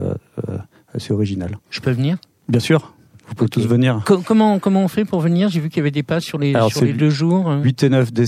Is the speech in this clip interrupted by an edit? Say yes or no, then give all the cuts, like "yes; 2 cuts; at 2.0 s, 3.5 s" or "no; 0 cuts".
no; 0 cuts